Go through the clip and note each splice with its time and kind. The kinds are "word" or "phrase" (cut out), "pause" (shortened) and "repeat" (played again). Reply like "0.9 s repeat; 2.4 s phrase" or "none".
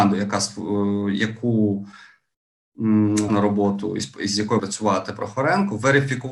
3.3 s word; 4.6 s word